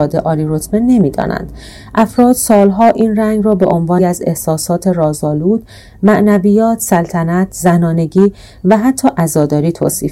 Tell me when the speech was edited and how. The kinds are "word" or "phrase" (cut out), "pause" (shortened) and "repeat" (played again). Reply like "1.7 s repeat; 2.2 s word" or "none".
4.0 s word